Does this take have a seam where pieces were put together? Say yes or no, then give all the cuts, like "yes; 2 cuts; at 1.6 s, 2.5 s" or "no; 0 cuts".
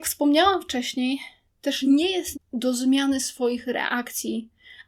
yes; 2 cuts; at 1.5 s, 2.3 s